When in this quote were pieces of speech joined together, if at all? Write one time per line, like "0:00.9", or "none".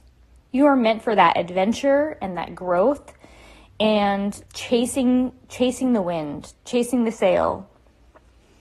0:04.5